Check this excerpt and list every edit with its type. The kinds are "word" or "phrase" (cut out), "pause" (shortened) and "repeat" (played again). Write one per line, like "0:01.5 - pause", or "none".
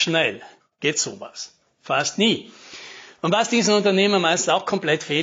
none